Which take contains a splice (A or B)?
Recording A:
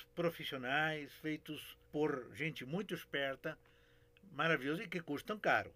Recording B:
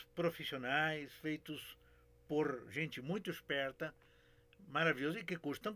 A